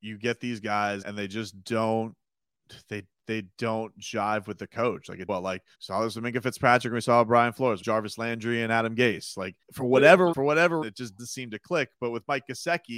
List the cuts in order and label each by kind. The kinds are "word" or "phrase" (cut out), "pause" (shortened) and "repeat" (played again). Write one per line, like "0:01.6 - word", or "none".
0:01.0 - word
0:05.3 - phrase
0:05.7 - pause
0:07.8 - phrase
0:09.6 - pause
0:10.3 - word
0:10.8 - word
0:11.2 - word

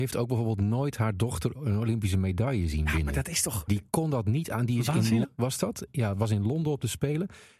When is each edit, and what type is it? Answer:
0:05.2 - word

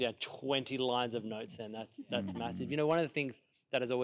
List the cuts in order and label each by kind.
none

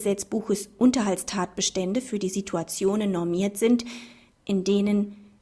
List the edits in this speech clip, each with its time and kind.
none

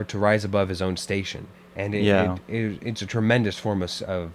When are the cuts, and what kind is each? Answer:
0:01.5 - pause

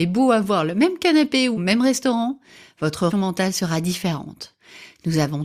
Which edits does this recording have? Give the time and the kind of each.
0:01.6 - phrase
0:03.1 - word

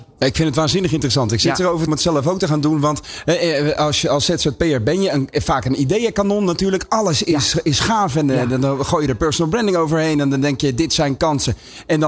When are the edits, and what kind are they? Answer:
0:01.9 - phrase

